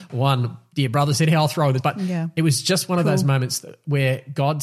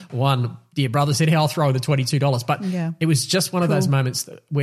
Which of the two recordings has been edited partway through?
first; 1 cut; at 1.8 s

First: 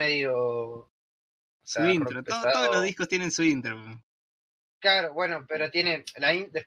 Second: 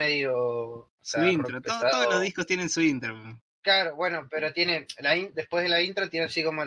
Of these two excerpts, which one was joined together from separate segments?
second; 2 cuts; at 0.9 s, 3.5 s

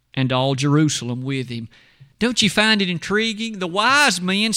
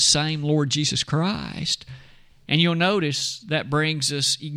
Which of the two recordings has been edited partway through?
first; 1 cut; at 2.1 s

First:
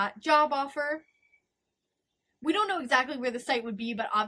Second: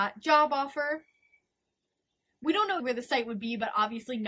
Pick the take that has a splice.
second; 1 cut; at 2.8 s

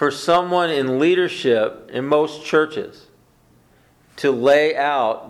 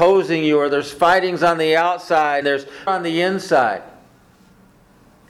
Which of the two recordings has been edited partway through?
second; 2 cuts; at 2.4 s, 2.9 s

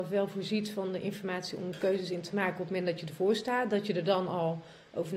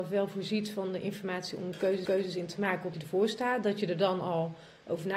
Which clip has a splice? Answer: second; 2 cuts; at 2.0 s, 2.9 s

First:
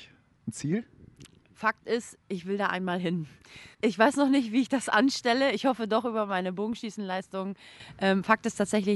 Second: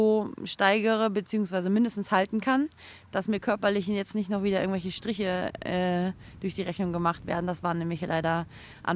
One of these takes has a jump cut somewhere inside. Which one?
first; 1 cut; at 3.7 s

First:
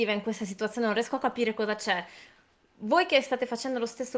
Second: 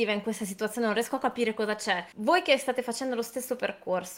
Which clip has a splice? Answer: second; 1 cut; at 2.1 s

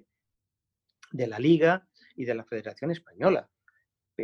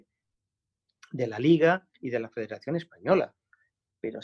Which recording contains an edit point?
second; 1 cut; at 1.9 s

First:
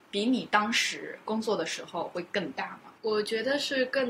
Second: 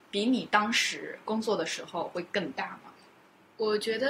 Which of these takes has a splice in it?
first; 1 cut; at 3.0 s

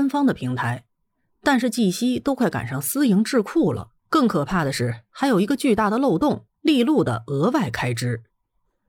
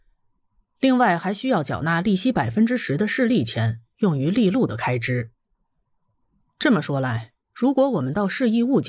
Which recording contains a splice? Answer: first; 2 cuts; at 4.0 s, 6.5 s

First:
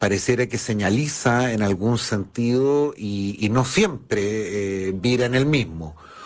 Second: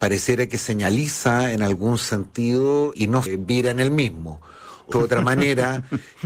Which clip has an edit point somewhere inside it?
second; 3 cuts; at 2.9 s, 3.3 s, 4.9 s

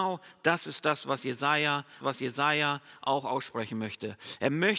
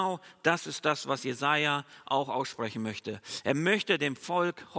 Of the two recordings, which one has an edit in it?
first; 1 cut; at 2.0 s

